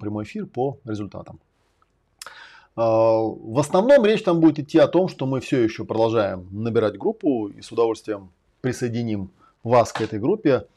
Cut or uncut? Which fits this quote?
uncut